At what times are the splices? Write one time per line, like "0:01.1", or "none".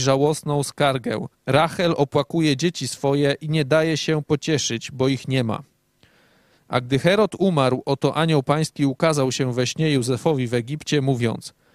0:01.3